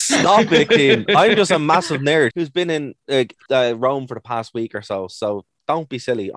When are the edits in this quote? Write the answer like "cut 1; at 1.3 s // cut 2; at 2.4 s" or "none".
cut 1; at 2.3 s

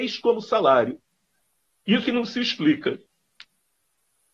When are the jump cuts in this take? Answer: cut 1; at 2.0 s

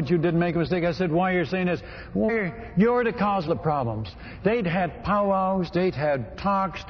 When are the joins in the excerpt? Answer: cut 1; at 2.3 s // cut 2; at 3.5 s

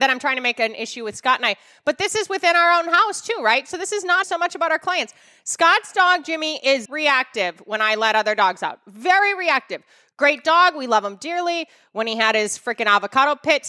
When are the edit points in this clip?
cut 1; at 4.2 s // cut 2; at 6.8 s

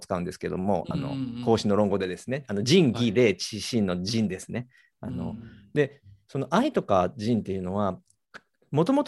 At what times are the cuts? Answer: none

